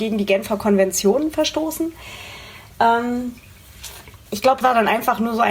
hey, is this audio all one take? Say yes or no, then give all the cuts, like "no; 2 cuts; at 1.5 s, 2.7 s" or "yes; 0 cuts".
no; 2 cuts; at 4.2 s, 4.6 s